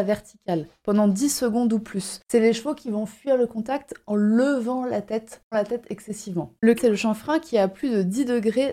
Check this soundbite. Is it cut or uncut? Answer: cut